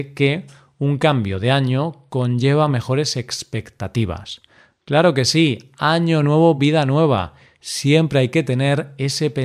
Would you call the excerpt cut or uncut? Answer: uncut